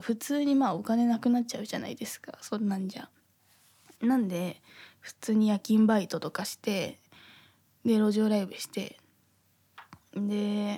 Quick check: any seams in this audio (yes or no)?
no